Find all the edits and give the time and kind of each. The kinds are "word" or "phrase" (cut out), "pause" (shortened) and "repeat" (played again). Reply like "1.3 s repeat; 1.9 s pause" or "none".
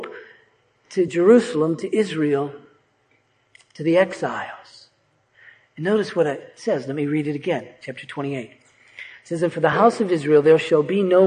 none